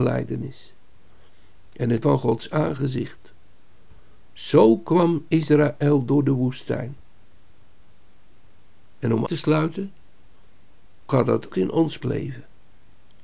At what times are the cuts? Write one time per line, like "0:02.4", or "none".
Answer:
0:02.0
0:09.3
0:11.1
0:11.5
0:12.0